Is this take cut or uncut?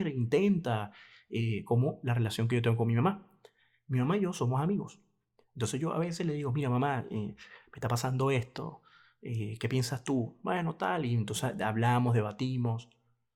uncut